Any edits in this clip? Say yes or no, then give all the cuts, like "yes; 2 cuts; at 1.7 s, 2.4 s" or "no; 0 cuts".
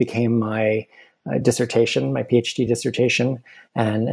no; 0 cuts